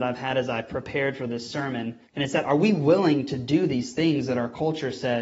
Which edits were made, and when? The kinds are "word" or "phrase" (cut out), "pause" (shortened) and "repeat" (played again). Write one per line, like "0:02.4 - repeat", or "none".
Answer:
0:02.1 - pause